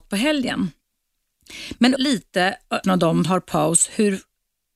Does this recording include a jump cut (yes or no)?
yes